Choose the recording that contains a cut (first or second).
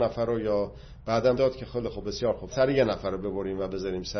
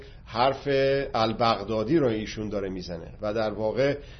first